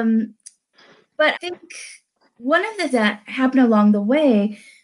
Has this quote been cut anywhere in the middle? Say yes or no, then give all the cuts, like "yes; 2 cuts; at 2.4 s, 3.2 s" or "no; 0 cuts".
yes; 2 cuts; at 1.3 s, 2.9 s